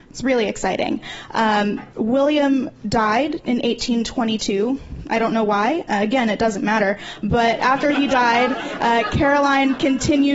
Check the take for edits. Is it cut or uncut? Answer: cut